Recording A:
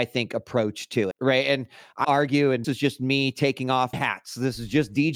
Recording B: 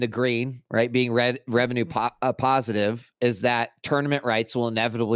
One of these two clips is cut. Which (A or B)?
A